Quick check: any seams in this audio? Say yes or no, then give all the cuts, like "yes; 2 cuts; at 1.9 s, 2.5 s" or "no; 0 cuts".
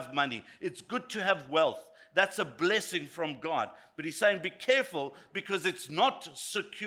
no; 0 cuts